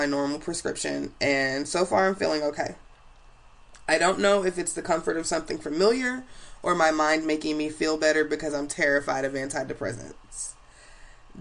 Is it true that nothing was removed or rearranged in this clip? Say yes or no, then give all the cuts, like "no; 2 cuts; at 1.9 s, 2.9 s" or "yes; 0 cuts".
yes; 0 cuts